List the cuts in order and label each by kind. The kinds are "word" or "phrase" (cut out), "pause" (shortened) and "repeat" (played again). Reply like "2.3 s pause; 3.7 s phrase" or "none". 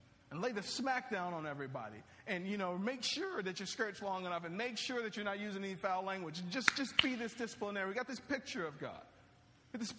none